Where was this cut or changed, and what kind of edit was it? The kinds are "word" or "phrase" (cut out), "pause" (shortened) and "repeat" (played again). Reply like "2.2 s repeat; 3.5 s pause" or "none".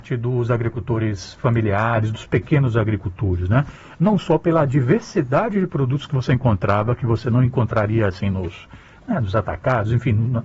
none

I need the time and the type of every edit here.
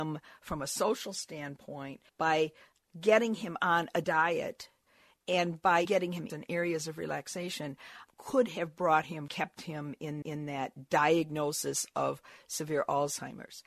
2.1 s pause; 4.0 s phrase; 5.8 s word; 6.3 s phrase; 8.1 s word; 9.3 s phrase; 10.2 s repeat

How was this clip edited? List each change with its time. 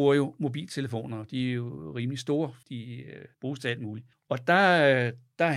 2.6 s word; 3.3 s pause; 4.1 s pause

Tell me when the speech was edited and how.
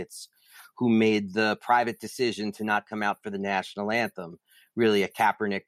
none

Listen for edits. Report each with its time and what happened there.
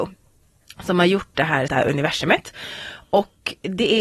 1.7 s word

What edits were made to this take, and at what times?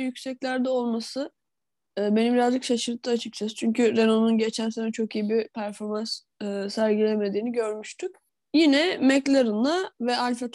none

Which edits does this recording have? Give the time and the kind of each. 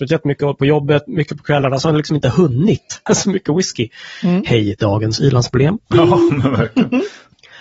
1.1 s word; 3.1 s word

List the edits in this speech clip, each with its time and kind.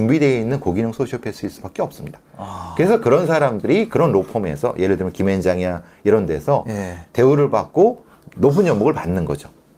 8.1 s pause

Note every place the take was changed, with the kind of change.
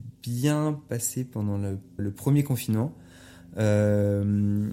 2.0 s word

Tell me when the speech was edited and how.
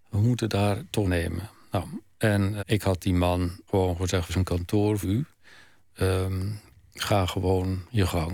1.0 s phrase; 2.6 s word; 3.7 s word; 4.3 s phrase; 5.0 s word

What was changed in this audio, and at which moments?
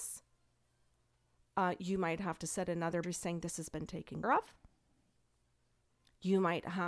3.0 s word; 4.2 s word

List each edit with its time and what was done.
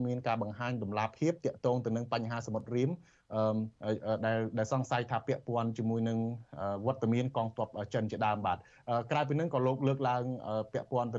3.8 s pause

